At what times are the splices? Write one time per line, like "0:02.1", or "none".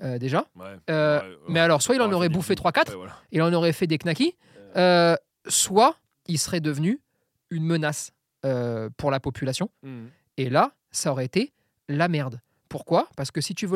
none